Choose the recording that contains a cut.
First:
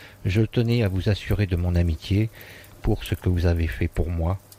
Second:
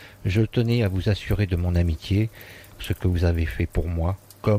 second; 1 cut; at 2.8 s

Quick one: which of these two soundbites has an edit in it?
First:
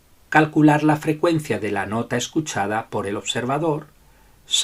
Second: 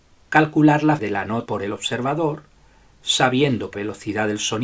second; 3 cuts; at 1.0 s, 1.5 s, 3.7 s

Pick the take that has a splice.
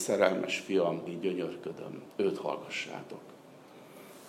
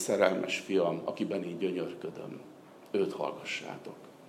first; 2 cuts; at 1.1 s, 2.1 s

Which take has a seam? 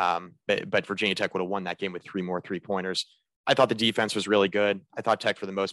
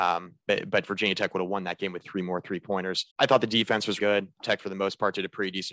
second; 3 cuts; at 3.1 s, 4.0 s, 4.4 s

